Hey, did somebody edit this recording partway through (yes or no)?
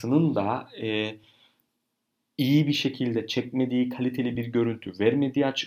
no